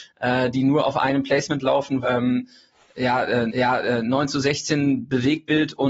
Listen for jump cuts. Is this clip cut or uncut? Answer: cut